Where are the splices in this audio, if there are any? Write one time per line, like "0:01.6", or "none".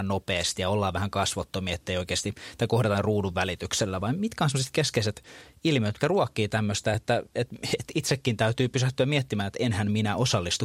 none